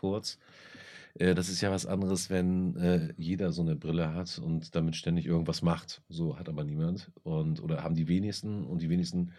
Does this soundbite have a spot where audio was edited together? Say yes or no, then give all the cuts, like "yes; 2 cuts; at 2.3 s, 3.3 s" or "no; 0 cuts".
no; 0 cuts